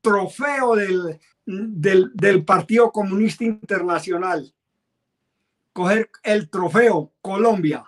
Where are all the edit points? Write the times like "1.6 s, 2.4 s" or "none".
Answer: 1.3 s